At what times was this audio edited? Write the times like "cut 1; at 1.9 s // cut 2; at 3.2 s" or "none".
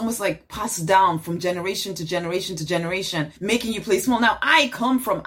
cut 1; at 3.4 s